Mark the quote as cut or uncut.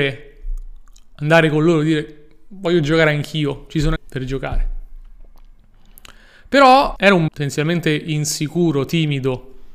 cut